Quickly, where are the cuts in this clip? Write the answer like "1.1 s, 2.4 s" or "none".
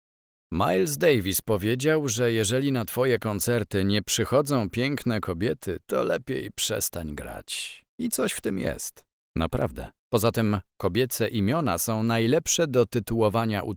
10.0 s